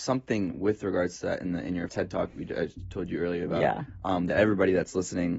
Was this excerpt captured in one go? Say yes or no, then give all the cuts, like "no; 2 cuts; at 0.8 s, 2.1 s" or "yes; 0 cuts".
no; 2 cuts; at 1.9 s, 2.3 s